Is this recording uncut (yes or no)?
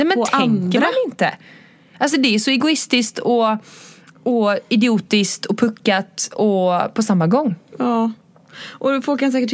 yes